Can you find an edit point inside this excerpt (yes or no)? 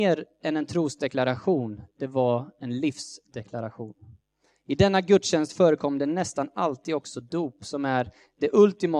no